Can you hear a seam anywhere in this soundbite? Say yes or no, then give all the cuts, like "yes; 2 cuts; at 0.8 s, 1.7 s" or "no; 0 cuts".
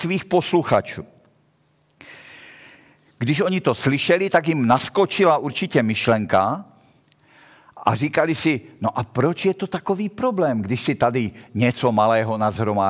no; 0 cuts